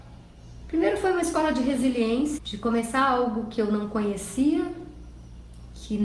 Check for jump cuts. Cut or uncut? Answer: cut